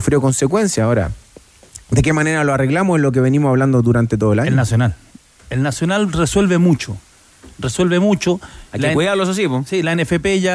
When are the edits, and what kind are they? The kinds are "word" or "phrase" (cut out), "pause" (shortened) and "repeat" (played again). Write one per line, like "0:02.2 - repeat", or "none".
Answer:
none

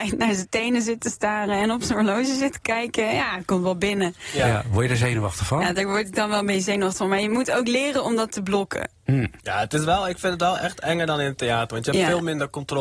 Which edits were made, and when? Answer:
0:09.4 - pause

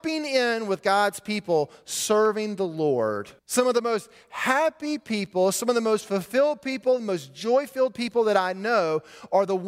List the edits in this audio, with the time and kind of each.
0:03.4 - pause

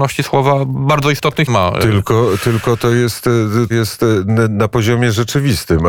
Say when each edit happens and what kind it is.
0:01.5 - word
0:03.7 - word

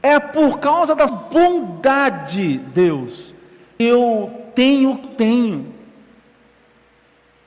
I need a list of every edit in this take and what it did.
0:01.1 - word
0:03.8 - word
0:05.0 - word

